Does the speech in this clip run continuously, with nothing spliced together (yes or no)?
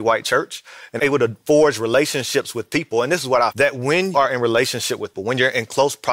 no